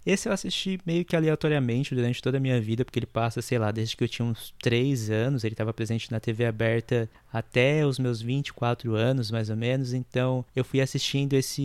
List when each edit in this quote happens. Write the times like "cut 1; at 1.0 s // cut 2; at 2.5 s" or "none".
cut 1; at 10.5 s